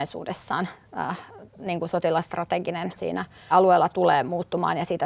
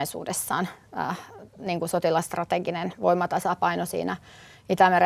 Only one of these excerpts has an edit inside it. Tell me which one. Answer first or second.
first